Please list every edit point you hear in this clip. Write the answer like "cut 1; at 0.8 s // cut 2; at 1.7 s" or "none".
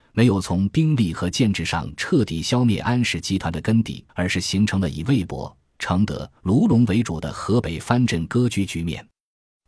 cut 1; at 4.1 s // cut 2; at 6.4 s

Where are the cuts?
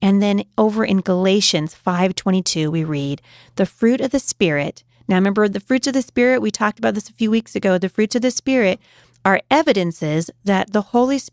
none

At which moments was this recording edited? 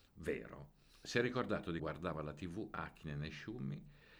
cut 1; at 1.8 s

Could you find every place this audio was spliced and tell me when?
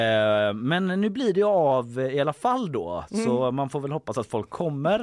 none

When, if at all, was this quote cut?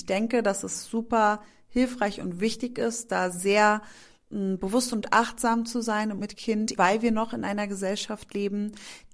cut 1; at 6.2 s // cut 2; at 6.8 s

